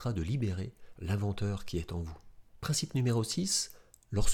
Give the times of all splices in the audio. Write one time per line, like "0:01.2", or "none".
0:02.5